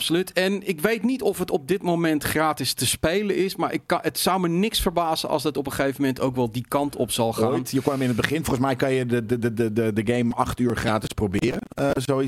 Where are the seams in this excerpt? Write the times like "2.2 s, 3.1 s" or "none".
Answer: none